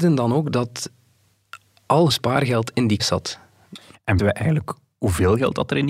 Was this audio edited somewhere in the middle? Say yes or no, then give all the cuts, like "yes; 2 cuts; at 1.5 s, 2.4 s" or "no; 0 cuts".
yes; 3 cuts; at 2.1 s, 3.0 s, 4.2 s